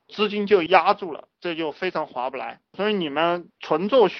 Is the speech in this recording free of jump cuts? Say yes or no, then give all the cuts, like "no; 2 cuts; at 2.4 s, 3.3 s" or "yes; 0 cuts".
no; 1 cut; at 2.7 s